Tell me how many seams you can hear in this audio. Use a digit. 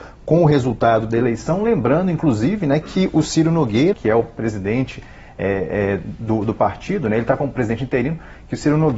1